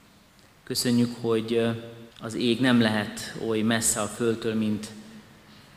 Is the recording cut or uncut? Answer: cut